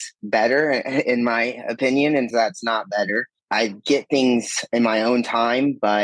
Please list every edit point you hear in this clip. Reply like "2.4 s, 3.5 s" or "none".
2.3 s